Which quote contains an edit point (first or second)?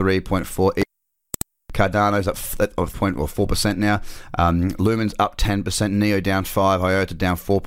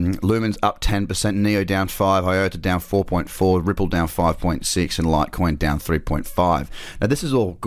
first